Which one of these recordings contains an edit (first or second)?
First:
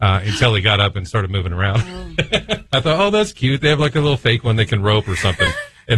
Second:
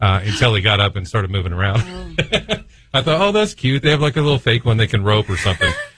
first